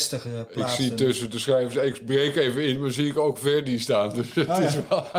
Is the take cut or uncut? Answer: uncut